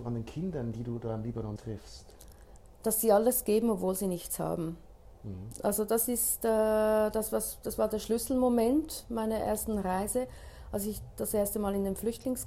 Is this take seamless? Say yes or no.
no